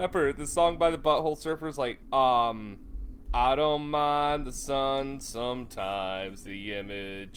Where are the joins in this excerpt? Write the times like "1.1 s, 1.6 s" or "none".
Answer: none